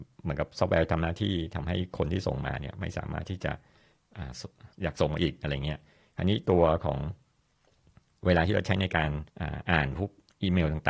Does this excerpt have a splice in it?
yes; 2 cuts; at 4.7 s, 9.3 s

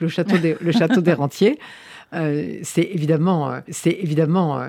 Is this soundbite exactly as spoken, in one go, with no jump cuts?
no; 1 cut; at 3.7 s

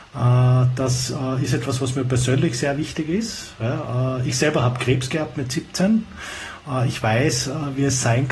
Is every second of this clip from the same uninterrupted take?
yes; 0 cuts

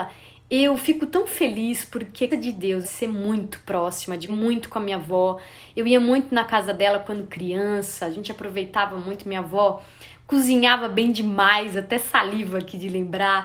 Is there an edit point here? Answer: yes; 3 cuts; at 2.3 s, 2.8 s, 4.3 s

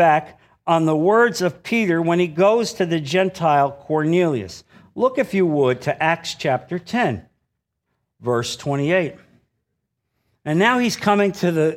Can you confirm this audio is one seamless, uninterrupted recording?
yes; 0 cuts

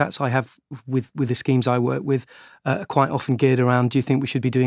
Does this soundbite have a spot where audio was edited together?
no; 0 cuts

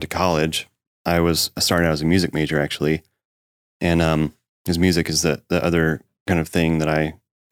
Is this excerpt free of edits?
yes; 0 cuts

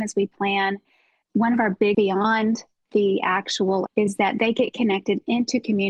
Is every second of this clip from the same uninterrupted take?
no; 3 cuts; at 1.2 s, 1.9 s, 3.9 s

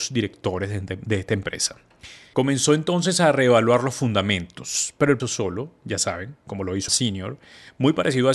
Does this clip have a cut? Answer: yes; 2 cuts; at 5.2 s, 6.9 s

